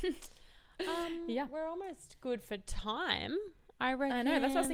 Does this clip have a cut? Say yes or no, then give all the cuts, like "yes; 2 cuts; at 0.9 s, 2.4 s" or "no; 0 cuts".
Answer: no; 0 cuts